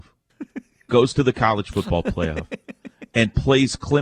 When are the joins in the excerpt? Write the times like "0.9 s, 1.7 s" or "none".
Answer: none